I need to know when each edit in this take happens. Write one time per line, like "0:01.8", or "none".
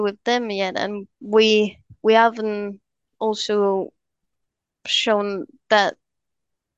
0:01.1